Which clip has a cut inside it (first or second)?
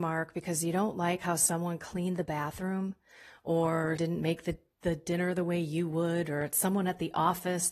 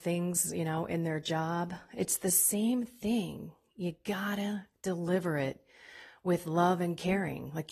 first